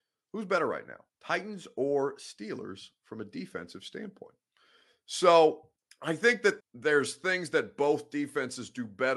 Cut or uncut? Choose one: cut